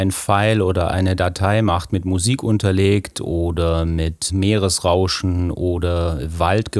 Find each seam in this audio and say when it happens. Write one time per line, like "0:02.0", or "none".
0:04.3

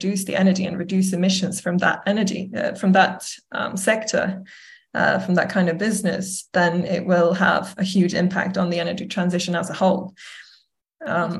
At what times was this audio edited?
none

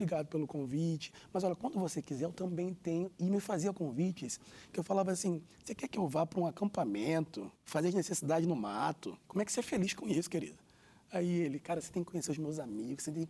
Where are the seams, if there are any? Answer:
0:07.6

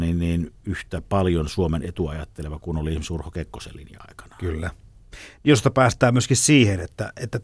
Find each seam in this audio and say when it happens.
none

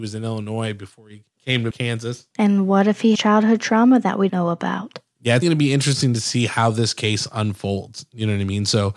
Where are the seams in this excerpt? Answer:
0:01.7
0:03.1
0:04.3
0:05.4

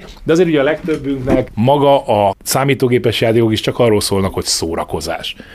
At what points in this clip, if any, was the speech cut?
none

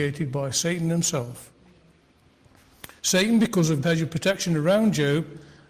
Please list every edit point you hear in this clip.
0:03.8

